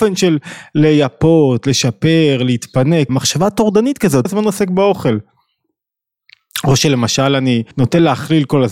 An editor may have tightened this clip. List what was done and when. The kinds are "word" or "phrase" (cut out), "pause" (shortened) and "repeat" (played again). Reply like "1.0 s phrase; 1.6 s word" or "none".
3.1 s word; 4.3 s phrase; 7.7 s pause